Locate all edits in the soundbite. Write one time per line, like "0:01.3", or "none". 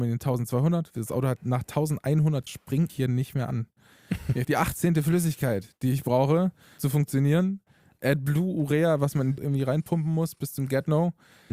0:01.4
0:02.5
0:02.9
0:04.4
0:06.8
0:09.4

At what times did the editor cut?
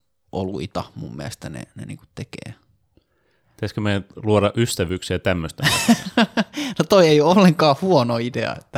none

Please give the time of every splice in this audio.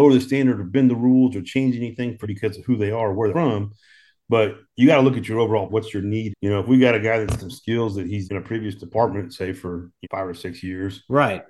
0:02.2
0:03.3
0:05.7
0:06.3
0:07.4
0:08.3
0:10.0

